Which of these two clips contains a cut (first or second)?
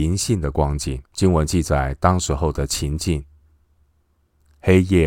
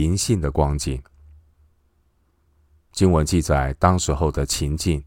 first